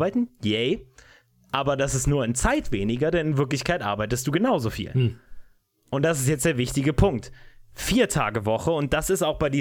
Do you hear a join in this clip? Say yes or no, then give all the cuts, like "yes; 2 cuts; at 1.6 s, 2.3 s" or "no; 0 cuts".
no; 0 cuts